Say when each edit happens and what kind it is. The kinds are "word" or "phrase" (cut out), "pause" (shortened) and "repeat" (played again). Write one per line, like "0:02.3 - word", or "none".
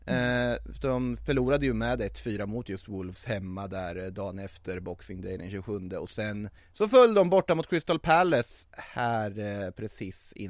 0:06.6 - pause